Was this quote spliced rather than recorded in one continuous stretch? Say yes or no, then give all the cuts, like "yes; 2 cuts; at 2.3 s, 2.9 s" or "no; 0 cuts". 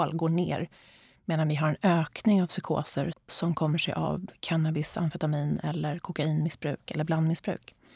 yes; 1 cut; at 3.1 s